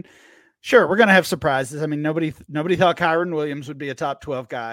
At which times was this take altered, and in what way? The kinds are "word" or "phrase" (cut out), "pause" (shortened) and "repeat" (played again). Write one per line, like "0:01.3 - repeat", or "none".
none